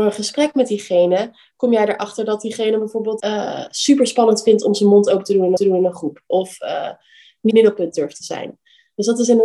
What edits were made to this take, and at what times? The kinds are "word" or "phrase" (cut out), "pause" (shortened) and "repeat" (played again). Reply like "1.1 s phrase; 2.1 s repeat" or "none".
3.2 s word; 5.6 s repeat; 7.5 s word